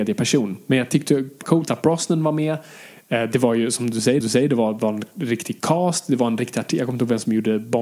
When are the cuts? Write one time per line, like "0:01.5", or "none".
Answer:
0:01.4
0:04.2